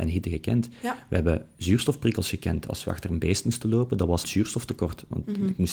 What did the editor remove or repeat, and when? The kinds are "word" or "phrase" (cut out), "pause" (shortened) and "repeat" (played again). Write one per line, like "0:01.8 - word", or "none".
0:04.2 - word